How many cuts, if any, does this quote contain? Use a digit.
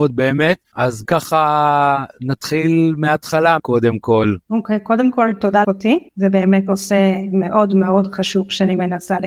4